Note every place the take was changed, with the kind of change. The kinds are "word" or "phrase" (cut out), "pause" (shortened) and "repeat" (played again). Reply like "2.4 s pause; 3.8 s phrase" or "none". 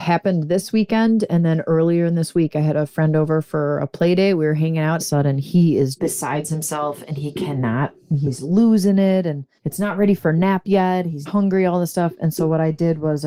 5.0 s phrase; 6.0 s word; 9.6 s pause; 11.3 s word

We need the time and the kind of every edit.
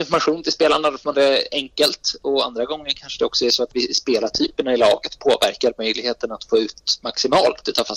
1.1 s word

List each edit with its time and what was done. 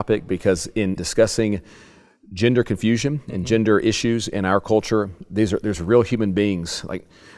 1.0 s word

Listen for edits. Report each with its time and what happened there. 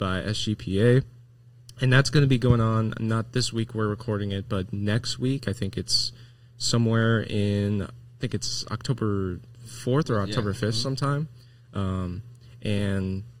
none

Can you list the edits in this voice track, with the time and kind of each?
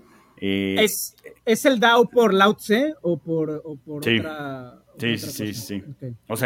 none

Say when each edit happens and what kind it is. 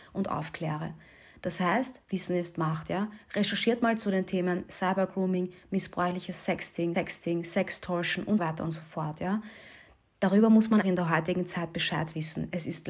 6.9 s repeat; 8.4 s word; 10.8 s word

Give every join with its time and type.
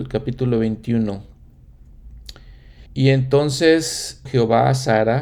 2.9 s pause; 4.3 s word

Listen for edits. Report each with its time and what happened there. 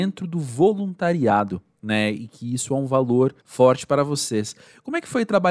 3.4 s pause

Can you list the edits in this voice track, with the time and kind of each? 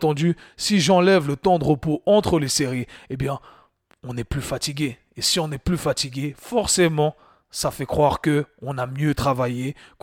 none

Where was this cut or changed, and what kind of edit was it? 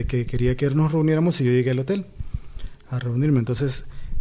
none

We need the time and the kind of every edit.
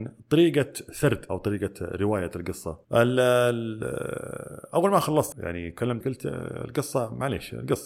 1.3 s word; 2.8 s pause; 5.3 s word; 6.0 s word

